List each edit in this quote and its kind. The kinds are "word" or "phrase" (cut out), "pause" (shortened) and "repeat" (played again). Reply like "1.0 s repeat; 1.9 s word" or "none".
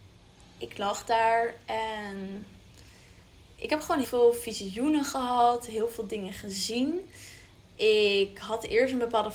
4.0 s word

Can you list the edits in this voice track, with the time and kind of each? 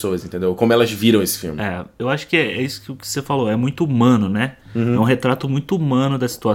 none

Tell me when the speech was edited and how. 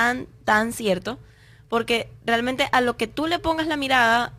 none

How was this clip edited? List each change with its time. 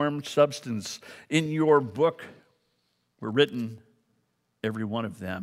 none

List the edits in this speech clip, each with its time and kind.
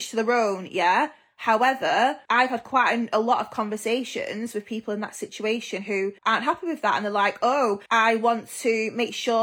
2.2 s pause; 6.2 s pause; 7.9 s pause

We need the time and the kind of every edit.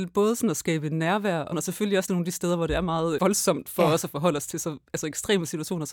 1.5 s word; 2.1 s word; 3.2 s word

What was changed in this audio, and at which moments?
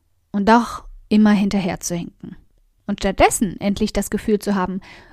none

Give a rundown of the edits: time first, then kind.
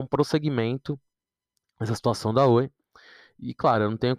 none

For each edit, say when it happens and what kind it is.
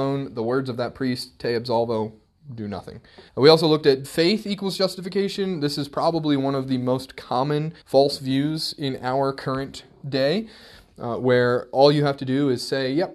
3.3 s pause; 4.0 s phrase; 7.8 s pause

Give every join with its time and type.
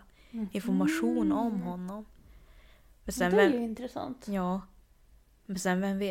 none

